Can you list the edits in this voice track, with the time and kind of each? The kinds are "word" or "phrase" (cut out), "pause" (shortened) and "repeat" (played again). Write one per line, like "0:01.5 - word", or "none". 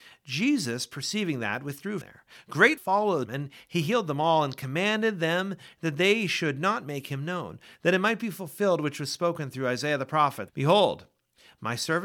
0:02.0 - word
0:02.8 - word
0:03.3 - word
0:10.5 - word